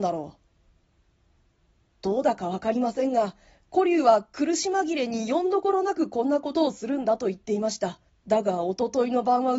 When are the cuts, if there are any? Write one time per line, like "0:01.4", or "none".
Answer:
0:08.1

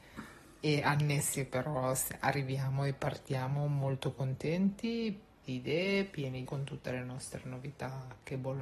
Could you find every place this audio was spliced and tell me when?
0:01.5
0:05.4
0:06.5

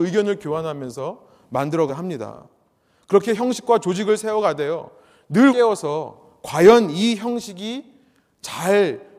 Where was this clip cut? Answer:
0:01.9
0:05.5

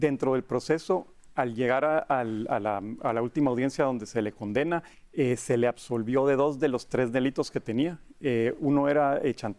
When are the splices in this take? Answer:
0:04.9

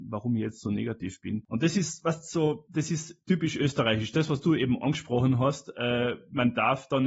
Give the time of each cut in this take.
none

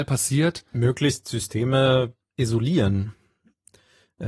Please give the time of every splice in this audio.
0:02.2

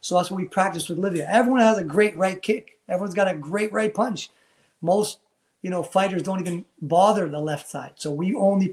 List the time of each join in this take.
none

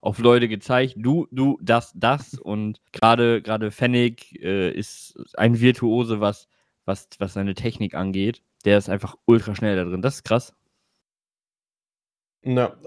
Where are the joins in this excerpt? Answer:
0:02.9
0:08.5

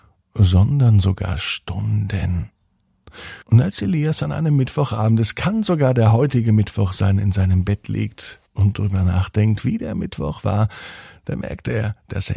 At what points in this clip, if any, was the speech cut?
0:03.4
0:08.5

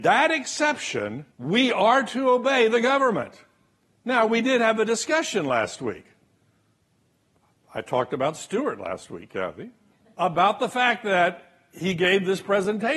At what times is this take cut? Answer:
0:01.3
0:03.8
0:09.9

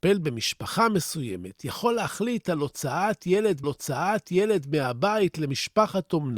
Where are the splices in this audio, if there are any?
0:03.6

